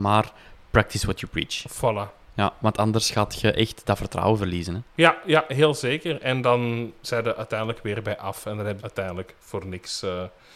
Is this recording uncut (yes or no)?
no